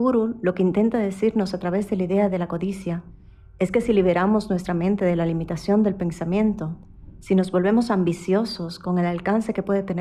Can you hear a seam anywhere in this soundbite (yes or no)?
no